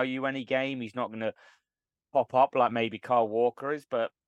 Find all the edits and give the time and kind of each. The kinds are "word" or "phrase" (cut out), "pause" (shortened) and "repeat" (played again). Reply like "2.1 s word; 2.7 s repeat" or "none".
none